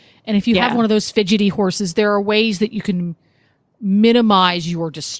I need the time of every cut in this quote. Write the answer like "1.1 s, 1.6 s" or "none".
none